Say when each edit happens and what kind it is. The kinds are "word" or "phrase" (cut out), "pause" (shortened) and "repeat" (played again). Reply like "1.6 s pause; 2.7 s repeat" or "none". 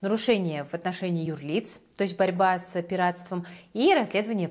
none